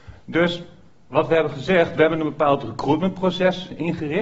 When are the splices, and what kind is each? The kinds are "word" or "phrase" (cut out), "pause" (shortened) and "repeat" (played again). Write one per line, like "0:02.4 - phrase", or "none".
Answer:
none